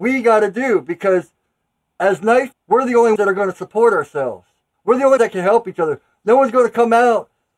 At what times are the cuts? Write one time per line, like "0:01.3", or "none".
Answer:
0:02.5
0:03.2
0:05.2